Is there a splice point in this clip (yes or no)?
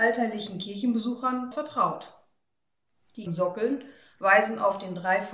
yes